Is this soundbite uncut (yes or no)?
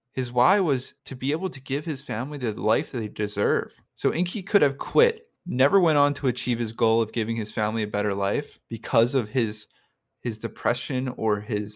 no